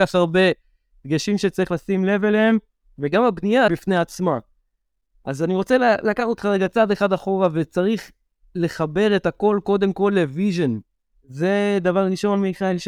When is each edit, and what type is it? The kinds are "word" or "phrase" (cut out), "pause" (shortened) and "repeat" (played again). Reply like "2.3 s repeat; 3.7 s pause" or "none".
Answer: 3.7 s phrase